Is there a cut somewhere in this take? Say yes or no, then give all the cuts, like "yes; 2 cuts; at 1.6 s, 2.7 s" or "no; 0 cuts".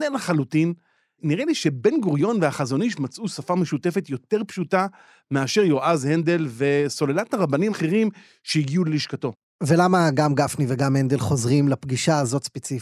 yes; 1 cut; at 7.7 s